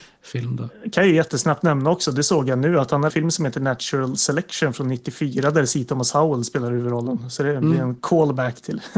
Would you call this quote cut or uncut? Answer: cut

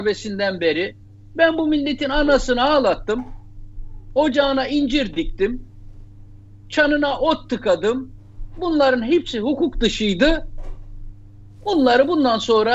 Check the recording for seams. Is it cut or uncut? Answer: uncut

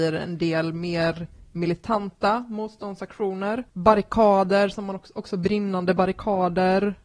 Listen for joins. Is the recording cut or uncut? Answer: cut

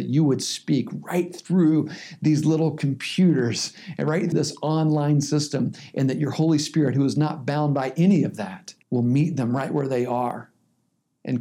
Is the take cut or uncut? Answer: cut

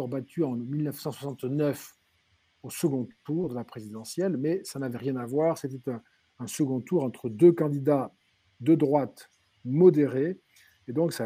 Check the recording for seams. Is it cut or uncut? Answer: uncut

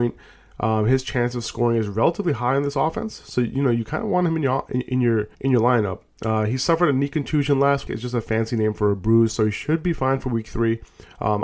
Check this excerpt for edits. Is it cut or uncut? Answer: cut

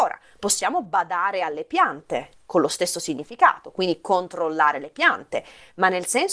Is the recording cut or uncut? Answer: uncut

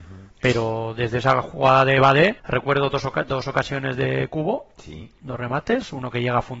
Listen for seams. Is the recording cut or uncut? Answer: cut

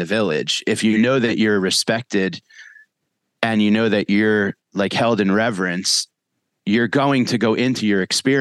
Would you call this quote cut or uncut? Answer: uncut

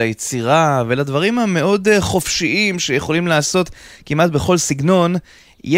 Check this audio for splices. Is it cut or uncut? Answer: uncut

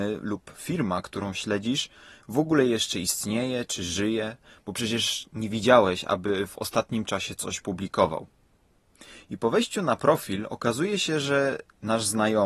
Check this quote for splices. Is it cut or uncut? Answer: uncut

